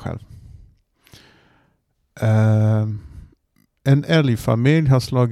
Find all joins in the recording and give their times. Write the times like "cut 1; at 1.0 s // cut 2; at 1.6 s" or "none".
none